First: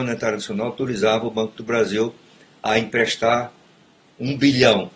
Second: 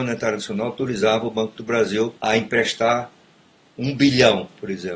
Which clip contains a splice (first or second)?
second